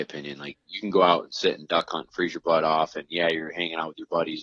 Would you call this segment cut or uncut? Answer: uncut